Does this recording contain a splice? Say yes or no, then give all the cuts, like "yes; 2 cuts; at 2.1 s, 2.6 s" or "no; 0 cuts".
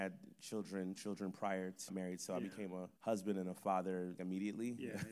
yes; 4 cuts; at 0.9 s, 1.9 s, 3.0 s, 4.2 s